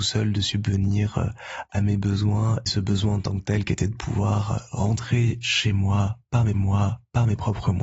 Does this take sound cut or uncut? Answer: cut